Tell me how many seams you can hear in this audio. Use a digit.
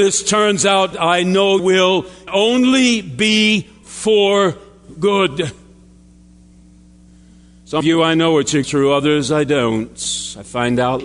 5